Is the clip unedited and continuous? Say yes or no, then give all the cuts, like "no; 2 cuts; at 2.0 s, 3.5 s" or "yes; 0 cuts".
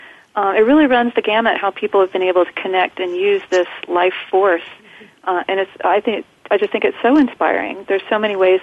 yes; 0 cuts